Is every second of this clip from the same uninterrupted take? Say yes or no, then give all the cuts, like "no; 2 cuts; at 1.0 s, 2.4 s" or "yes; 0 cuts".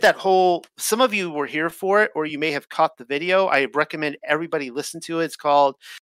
yes; 0 cuts